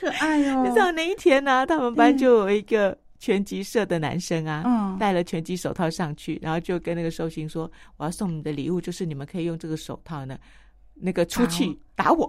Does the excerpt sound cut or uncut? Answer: uncut